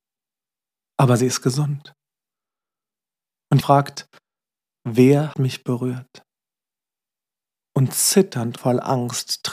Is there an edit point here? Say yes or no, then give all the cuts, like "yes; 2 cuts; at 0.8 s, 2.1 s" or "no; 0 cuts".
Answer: yes; 3 cuts; at 3.6 s, 5.3 s, 8.6 s